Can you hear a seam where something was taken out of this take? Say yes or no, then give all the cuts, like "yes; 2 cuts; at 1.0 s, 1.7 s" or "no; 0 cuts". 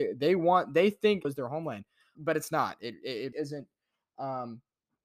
yes; 3 cuts; at 1.2 s, 2.1 s, 3.3 s